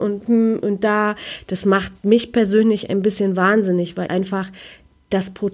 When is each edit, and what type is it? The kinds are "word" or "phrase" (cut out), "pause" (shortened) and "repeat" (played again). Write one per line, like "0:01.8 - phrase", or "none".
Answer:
0:02.0 - pause
0:04.1 - word

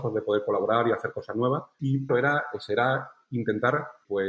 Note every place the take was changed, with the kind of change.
0:02.1 - phrase

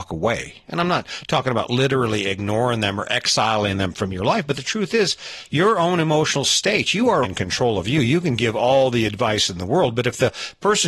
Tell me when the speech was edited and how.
0:07.2 - word

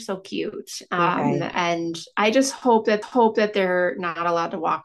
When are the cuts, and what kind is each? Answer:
0:03.0 - repeat

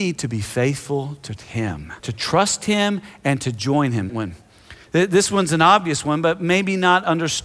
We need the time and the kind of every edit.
0:01.4 - word
0:02.0 - pause
0:04.1 - word

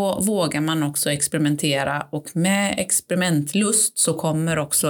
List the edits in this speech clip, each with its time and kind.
none

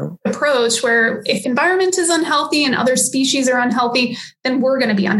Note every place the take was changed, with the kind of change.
0:01.4 - phrase

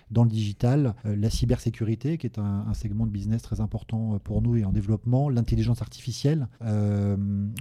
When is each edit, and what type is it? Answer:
0:01.0 - pause
0:06.5 - pause

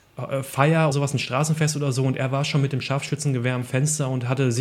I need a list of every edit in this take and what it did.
0:00.9 - word

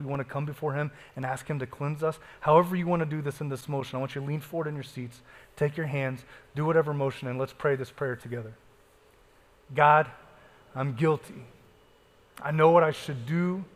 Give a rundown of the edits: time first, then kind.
none

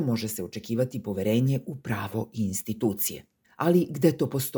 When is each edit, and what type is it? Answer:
0:03.4 - pause

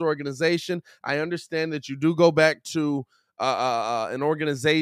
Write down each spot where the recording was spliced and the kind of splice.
none

